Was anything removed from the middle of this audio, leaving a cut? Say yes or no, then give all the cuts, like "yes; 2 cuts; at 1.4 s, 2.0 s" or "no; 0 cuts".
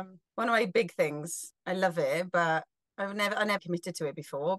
yes; 1 cut; at 3.6 s